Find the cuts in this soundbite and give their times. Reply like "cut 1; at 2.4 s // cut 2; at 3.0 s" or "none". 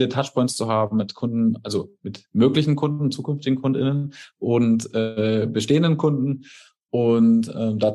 none

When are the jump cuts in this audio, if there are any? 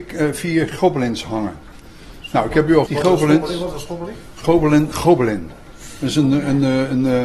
cut 1; at 2.9 s

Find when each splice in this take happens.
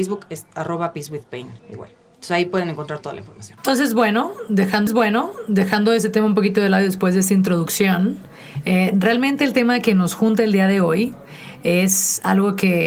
cut 1; at 1.6 s // cut 2; at 4.9 s

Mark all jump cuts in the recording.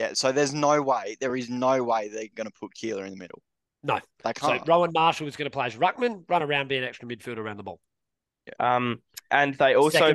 none

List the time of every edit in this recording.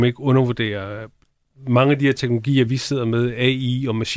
none

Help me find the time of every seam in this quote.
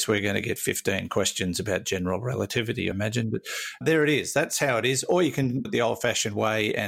cut 1; at 2.9 s // cut 2; at 3.8 s // cut 3; at 5.6 s

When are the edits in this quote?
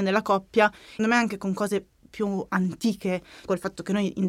cut 1; at 1.0 s

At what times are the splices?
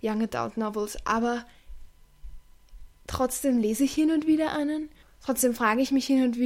cut 1; at 5.0 s

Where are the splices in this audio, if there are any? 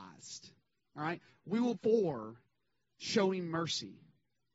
cut 1; at 1.7 s // cut 2; at 2.9 s

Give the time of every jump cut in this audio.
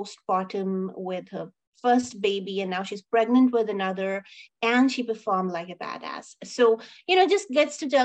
none

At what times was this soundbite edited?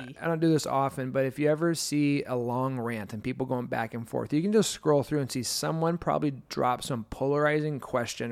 none

